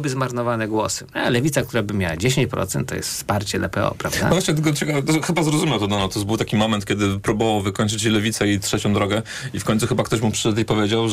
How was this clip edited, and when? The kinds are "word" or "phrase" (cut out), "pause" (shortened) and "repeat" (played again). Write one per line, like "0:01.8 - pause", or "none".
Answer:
none